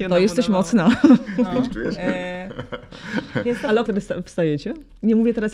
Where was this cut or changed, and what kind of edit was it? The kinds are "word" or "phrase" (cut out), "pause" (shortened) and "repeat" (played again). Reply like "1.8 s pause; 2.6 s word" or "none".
1.7 s word; 3.9 s word